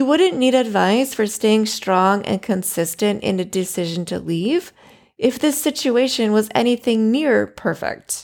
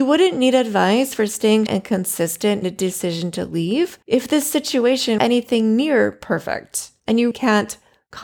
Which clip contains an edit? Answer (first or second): second